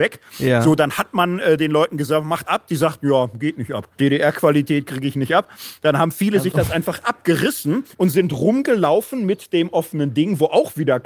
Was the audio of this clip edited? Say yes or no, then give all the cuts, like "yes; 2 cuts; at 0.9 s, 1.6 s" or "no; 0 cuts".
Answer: yes; 3 cuts; at 2.4 s, 3.9 s, 7.9 s